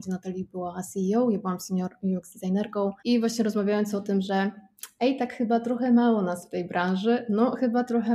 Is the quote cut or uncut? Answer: cut